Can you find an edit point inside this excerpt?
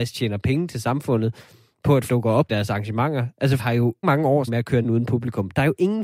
yes; 6 cuts; at 2.1 s, 2.5 s, 3.6 s, 4.0 s, 4.5 s, 4.8 s

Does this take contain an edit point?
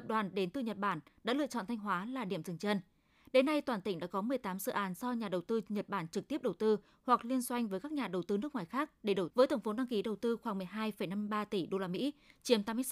yes; 1 cut; at 9.3 s

